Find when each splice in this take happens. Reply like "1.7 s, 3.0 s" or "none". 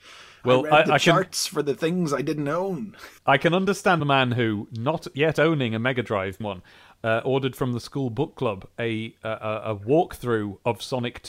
3.2 s, 4.0 s, 6.4 s

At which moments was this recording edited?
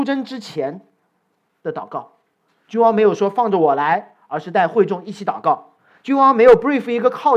none

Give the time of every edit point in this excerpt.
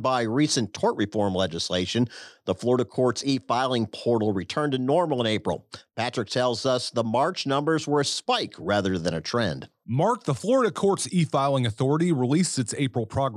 none

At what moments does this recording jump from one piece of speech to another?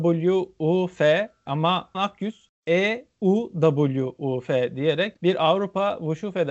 1.9 s, 5.2 s

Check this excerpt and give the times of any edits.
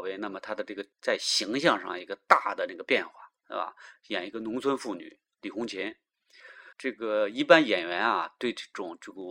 0.9 s, 6.7 s

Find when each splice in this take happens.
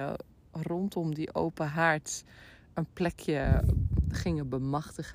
none

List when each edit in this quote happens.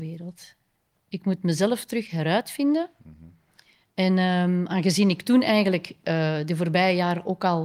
none

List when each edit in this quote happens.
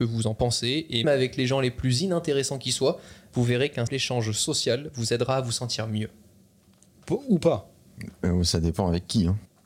1.0 s, 3.9 s

